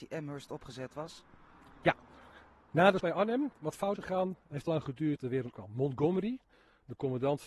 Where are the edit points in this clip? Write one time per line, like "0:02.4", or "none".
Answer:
0:03.0
0:04.0
0:04.7
0:05.2
0:05.5